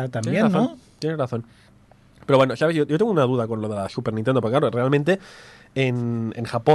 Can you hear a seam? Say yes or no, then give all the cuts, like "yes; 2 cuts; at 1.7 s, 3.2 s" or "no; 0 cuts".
no; 0 cuts